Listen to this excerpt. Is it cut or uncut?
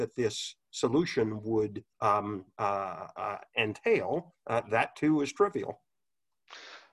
cut